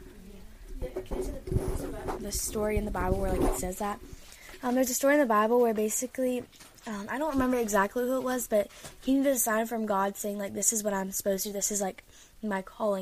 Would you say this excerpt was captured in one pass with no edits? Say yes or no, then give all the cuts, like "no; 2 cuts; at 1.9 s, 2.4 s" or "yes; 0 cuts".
yes; 0 cuts